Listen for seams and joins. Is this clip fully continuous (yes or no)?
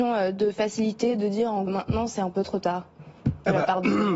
no